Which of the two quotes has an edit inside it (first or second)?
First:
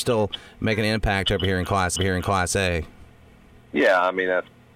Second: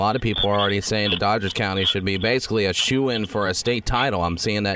first